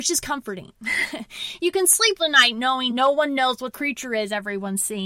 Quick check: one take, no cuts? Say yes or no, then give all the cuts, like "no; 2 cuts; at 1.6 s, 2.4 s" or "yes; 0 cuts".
no; 3 cuts; at 2.2 s, 2.9 s, 3.7 s